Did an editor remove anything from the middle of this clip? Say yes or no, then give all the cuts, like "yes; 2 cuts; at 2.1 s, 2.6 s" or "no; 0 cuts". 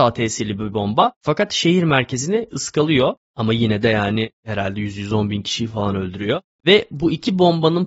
no; 0 cuts